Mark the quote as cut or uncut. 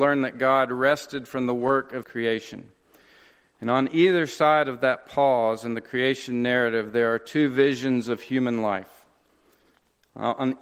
cut